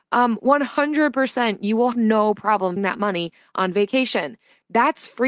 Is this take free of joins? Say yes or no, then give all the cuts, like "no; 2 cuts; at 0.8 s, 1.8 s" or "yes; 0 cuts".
no; 2 cuts; at 1.9 s, 2.8 s